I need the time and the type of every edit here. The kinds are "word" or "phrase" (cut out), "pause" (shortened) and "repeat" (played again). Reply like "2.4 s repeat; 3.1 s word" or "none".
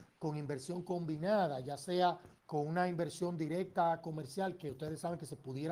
2.4 s pause